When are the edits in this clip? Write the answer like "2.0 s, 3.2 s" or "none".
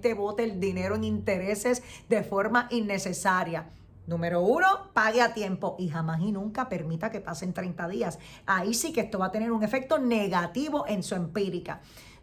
none